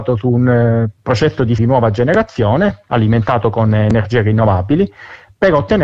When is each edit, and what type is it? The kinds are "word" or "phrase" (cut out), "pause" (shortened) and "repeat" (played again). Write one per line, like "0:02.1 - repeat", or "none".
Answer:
0:01.6 - phrase